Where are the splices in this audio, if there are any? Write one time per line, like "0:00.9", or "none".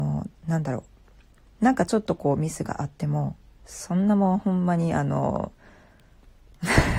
none